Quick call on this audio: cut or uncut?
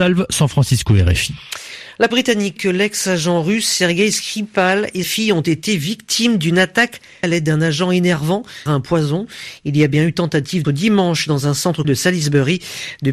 cut